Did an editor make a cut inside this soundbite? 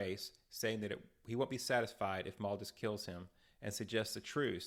no; 0 cuts

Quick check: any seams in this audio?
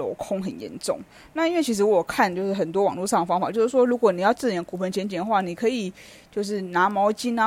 no; 0 cuts

